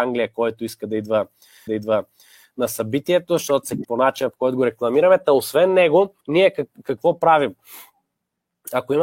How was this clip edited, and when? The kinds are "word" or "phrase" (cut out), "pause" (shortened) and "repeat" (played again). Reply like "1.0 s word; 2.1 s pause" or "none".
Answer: 1.7 s repeat; 3.8 s word; 6.2 s pause